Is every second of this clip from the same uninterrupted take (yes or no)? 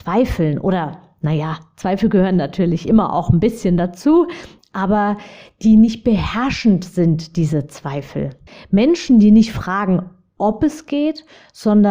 no